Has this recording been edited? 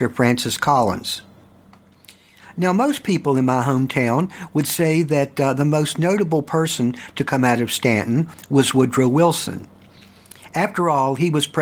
no; 0 cuts

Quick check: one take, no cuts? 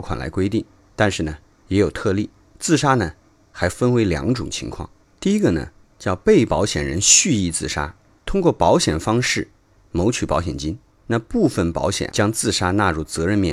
no; 1 cut; at 12.1 s

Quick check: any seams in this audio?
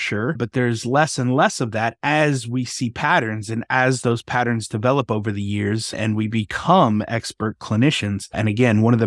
no; 0 cuts

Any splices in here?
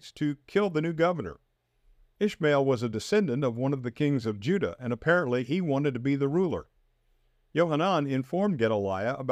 no; 0 cuts

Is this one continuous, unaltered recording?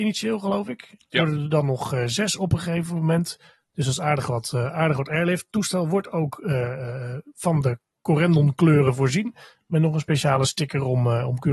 yes; 0 cuts

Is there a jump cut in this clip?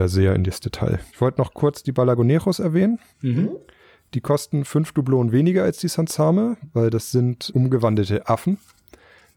yes; 3 cuts; at 1.1 s, 3.1 s, 7.5 s

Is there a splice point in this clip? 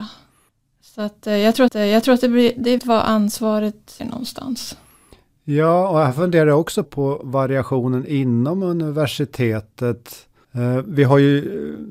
yes; 4 cuts; at 1.7 s, 2.8 s, 4.0 s, 6.8 s

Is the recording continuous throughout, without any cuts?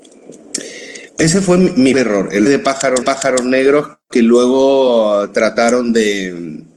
no; 4 cuts; at 1.1 s, 1.9 s, 2.5 s, 3.0 s

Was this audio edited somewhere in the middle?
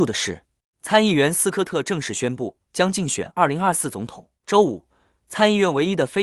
yes; 2 cuts; at 2.6 s, 4.3 s

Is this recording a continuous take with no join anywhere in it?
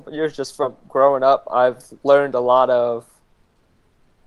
yes; 0 cuts

